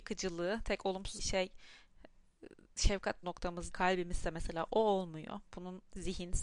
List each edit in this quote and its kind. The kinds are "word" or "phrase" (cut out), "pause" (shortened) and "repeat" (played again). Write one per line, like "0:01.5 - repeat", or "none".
0:01.2 - word
0:03.2 - word
0:03.7 - word